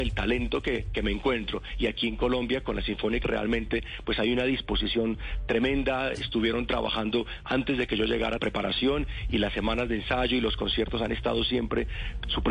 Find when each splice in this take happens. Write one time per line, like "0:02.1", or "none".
0:03.2
0:08.4